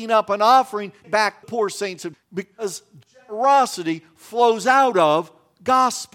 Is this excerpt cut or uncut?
cut